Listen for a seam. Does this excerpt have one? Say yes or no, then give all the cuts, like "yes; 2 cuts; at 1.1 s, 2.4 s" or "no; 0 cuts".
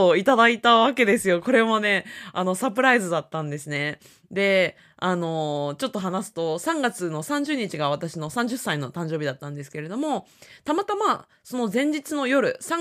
no; 0 cuts